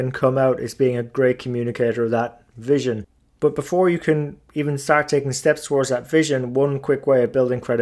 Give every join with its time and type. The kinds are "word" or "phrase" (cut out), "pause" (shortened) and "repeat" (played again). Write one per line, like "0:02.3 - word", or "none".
none